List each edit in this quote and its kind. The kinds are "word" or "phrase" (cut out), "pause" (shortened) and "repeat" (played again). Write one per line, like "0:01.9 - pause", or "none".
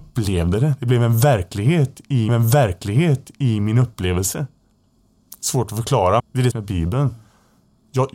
0:02.3 - repeat
0:06.2 - word
0:06.5 - phrase

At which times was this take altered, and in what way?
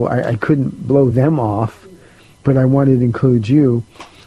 none

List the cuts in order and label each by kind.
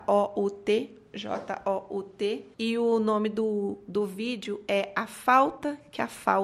0:02.5 - pause

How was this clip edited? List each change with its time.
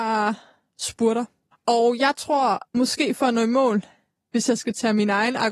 0:01.5 - pause
0:02.7 - pause
0:04.1 - pause

